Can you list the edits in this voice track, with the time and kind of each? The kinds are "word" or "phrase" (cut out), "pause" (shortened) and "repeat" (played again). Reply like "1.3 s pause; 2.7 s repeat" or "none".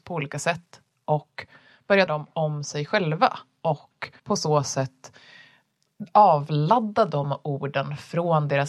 2.1 s word; 4.2 s pause